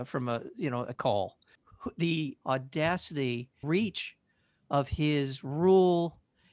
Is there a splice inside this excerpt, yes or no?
yes